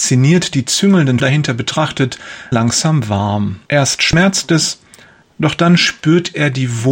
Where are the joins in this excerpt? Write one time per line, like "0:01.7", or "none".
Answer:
0:01.2
0:02.5
0:03.7